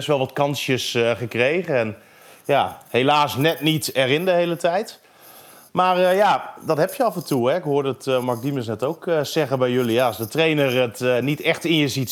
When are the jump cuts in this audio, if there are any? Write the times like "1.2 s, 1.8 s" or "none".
none